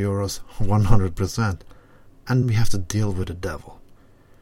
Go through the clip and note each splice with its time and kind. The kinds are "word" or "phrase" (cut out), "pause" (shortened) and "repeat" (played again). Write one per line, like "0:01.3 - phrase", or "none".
0:02.4 - word

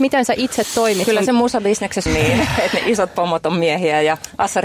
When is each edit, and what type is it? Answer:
0:02.1 - phrase

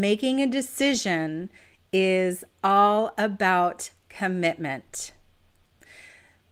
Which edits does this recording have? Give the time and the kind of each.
none

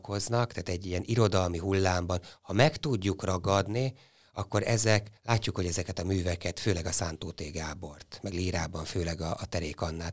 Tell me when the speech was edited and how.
0:05.2 - pause

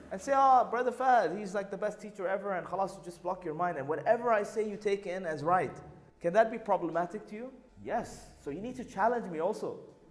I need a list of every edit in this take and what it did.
0:06.1 - pause
0:07.7 - pause

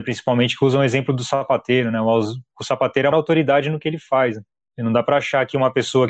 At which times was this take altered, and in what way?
0:03.1 - word

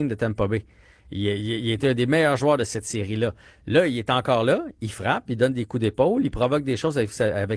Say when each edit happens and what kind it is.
none

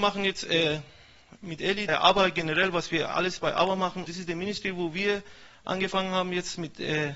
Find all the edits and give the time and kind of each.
0:01.9 - phrase
0:04.1 - word

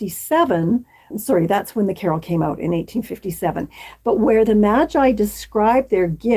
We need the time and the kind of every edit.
0:01.1 - word

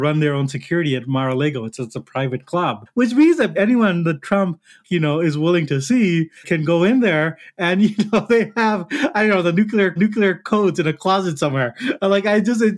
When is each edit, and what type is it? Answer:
0:03.5 - word
0:04.8 - word
0:10.0 - repeat

